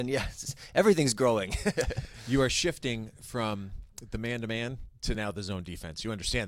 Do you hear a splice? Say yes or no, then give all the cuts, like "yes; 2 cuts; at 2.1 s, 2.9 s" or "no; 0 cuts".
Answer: no; 0 cuts